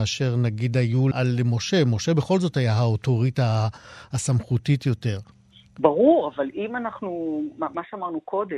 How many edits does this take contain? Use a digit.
2